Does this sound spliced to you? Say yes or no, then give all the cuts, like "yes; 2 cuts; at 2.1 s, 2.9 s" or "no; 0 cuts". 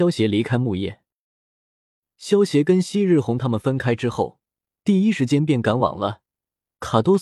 no; 0 cuts